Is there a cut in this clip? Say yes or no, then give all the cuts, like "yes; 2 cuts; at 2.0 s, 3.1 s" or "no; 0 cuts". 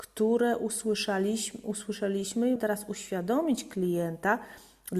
yes; 1 cut; at 2.6 s